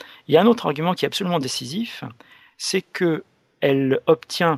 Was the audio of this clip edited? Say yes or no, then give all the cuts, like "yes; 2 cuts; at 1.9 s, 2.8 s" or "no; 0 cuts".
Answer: no; 0 cuts